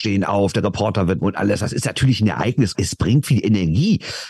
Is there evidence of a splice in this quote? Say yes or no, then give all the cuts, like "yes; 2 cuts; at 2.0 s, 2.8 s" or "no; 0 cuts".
yes; 3 cuts; at 1.2 s, 2.7 s, 3.2 s